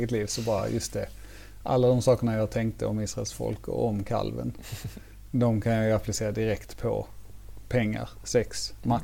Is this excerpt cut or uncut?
uncut